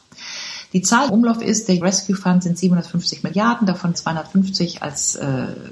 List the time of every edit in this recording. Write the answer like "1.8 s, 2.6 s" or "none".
1.1 s, 1.8 s, 3.9 s